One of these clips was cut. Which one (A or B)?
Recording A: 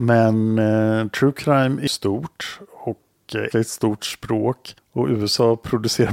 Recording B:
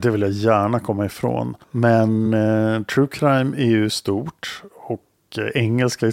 A